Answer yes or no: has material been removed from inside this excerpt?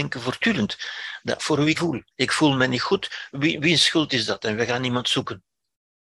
yes